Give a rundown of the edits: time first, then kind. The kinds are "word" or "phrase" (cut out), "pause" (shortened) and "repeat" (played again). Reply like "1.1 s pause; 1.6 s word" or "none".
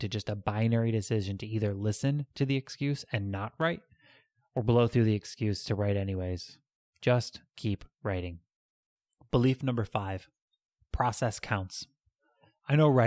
none